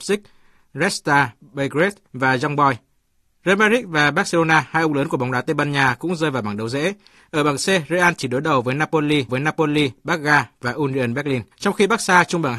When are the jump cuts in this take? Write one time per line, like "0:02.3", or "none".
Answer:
0:02.1
0:09.3
0:11.5

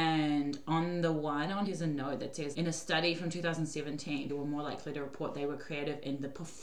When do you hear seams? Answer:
0:01.7
0:02.5
0:04.3

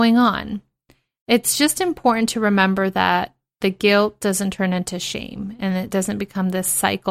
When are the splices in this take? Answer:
none

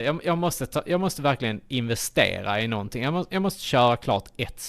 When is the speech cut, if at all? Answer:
none

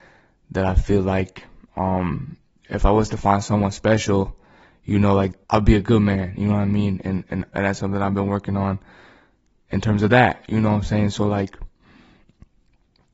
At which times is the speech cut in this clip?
0:05.4
0:07.5

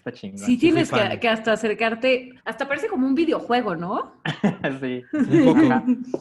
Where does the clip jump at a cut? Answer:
0:02.4

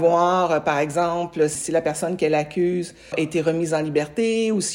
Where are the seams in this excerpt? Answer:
0:03.1

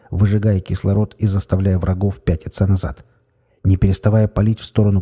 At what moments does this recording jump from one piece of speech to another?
none

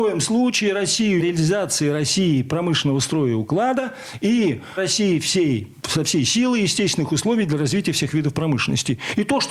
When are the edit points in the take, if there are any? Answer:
0:01.2
0:04.8

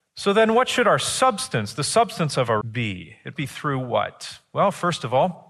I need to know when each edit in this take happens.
0:02.6
0:03.4

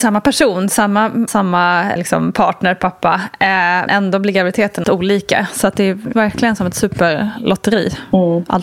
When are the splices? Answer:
0:01.3
0:02.0
0:03.9
0:04.8
0:06.1

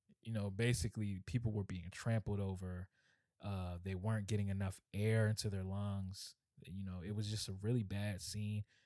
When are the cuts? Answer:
none

